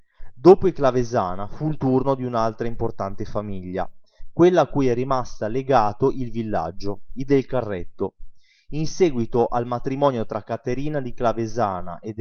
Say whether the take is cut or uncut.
uncut